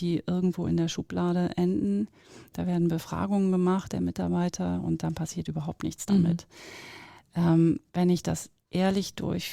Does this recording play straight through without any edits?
yes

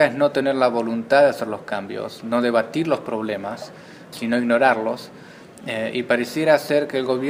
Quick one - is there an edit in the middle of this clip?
yes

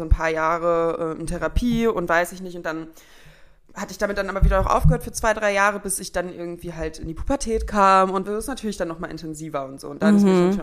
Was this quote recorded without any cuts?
no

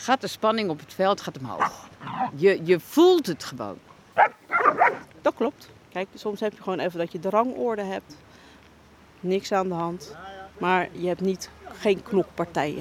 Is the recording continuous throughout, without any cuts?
yes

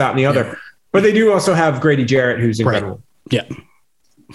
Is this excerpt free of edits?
yes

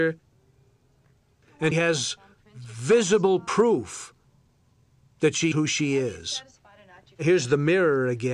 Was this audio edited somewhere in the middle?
yes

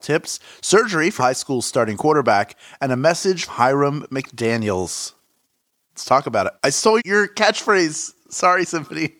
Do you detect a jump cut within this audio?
yes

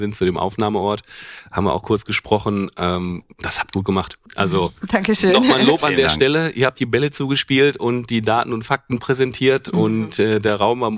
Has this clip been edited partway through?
yes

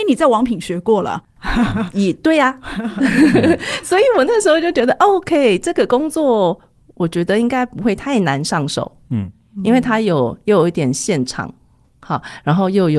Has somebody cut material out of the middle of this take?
no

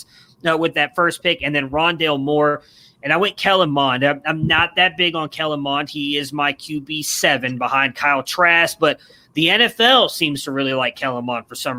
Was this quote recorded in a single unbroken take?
yes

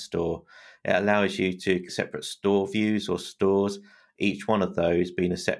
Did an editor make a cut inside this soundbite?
yes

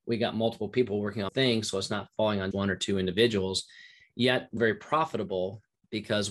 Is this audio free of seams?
no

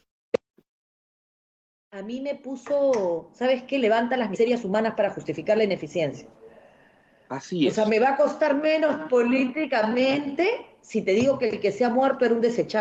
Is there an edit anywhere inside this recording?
no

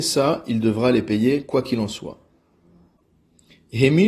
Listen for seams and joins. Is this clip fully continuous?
yes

